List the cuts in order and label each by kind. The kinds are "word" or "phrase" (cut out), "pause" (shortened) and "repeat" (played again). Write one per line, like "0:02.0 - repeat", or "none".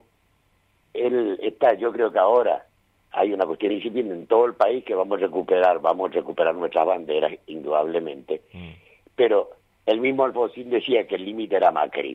none